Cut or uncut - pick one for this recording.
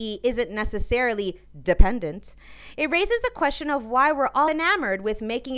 cut